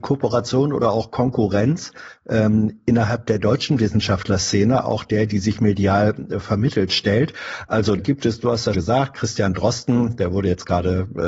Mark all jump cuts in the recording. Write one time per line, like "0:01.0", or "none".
0:08.0
0:08.7

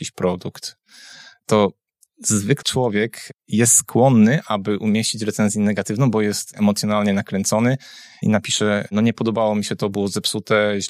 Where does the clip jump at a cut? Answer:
0:02.6
0:08.2

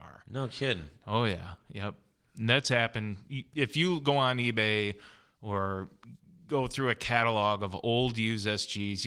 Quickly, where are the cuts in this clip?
none

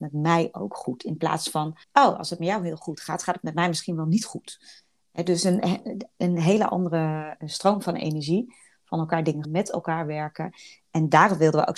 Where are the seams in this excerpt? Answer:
0:01.8
0:07.4
0:09.4

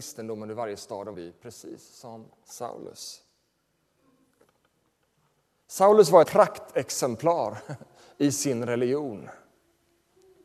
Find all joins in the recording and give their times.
0:01.1
0:06.2

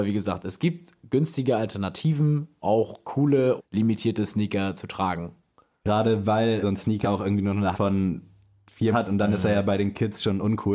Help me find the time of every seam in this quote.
0:02.6
0:03.6
0:06.6
0:07.0
0:07.7
0:08.9

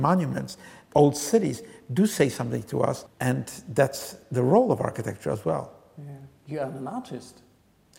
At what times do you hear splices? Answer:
0:00.9
0:03.1

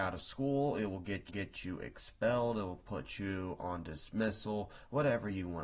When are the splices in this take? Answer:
0:01.3

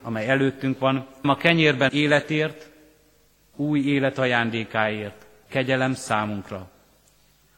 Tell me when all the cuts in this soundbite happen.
0:01.2
0:01.9
0:03.5
0:05.5

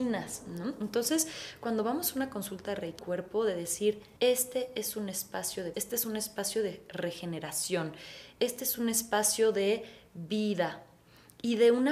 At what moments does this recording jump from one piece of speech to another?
0:03.0
0:04.2
0:05.7

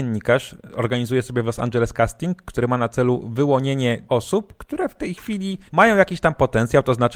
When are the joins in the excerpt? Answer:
0:04.1
0:05.7

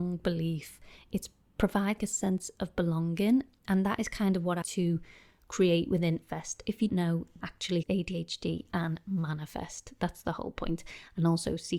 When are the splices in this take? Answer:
0:02.0
0:04.6
0:06.2
0:06.9
0:07.4
0:07.8

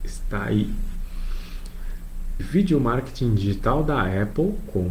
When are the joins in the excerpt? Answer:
0:02.4

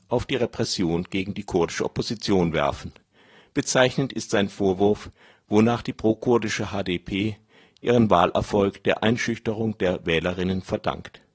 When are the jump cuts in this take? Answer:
none

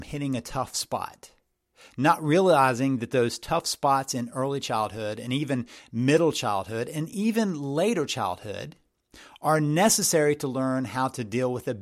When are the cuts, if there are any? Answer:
none

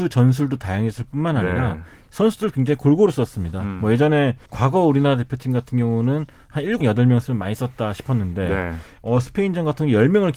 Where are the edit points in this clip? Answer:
0:04.5
0:06.8

